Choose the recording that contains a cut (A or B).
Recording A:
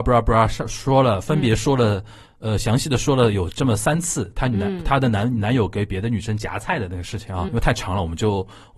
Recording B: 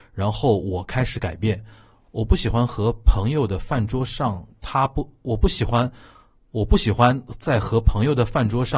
A